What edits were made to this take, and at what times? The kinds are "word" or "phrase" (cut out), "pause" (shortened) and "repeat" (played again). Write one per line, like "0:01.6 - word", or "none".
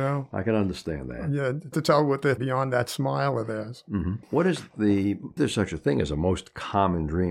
0:01.7 - word
0:02.4 - word
0:05.4 - word